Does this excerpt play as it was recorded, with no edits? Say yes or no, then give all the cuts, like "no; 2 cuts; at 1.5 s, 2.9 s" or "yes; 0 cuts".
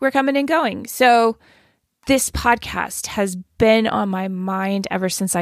yes; 0 cuts